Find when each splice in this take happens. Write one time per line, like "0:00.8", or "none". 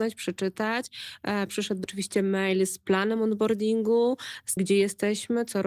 0:01.8
0:04.6

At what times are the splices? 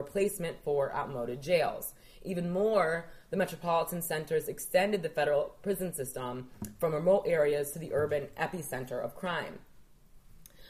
none

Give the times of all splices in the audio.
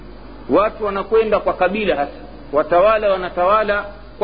none

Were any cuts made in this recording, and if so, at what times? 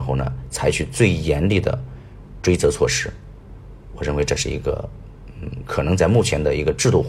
none

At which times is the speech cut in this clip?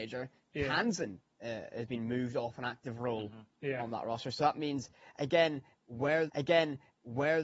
0:06.3

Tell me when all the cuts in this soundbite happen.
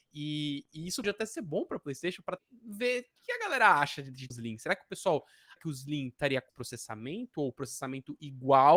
0:01.0
0:02.4
0:04.3
0:05.6
0:06.5

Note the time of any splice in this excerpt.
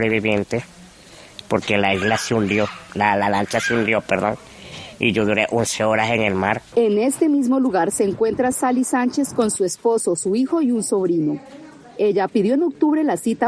none

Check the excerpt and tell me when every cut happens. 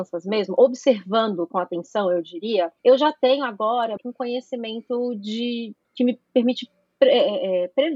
0:02.8
0:04.0

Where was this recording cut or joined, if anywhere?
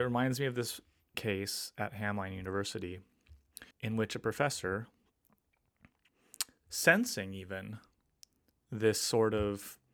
0:01.1
0:03.7

